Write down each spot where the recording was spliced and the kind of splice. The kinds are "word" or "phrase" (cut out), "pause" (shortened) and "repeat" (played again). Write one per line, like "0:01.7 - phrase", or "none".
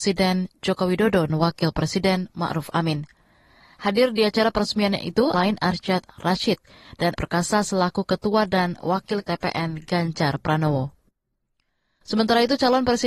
0:01.3 - word
0:05.3 - word
0:07.2 - word
0:09.2 - word